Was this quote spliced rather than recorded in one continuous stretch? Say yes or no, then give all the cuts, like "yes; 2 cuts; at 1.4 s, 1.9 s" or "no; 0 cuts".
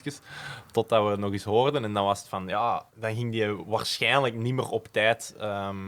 yes; 1 cut; at 2.9 s